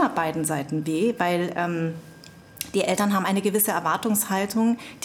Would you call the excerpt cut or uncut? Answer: uncut